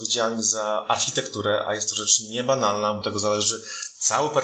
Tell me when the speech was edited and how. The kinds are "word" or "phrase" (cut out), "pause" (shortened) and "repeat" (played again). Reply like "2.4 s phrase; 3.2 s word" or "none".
3.0 s word